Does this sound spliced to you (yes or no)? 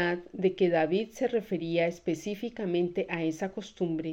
no